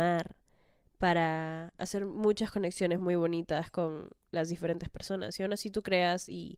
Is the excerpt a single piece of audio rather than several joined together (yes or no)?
yes